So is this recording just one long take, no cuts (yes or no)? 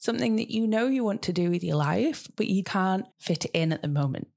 no